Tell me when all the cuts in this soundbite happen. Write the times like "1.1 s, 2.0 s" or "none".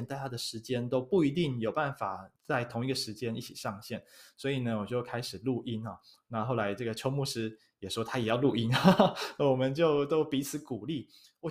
2.4 s